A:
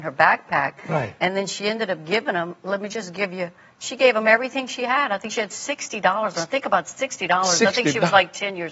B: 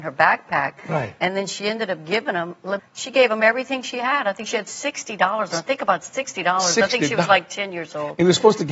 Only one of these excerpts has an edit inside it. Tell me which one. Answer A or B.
B